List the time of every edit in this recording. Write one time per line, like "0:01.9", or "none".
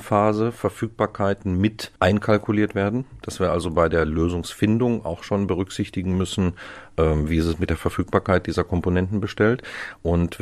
0:02.0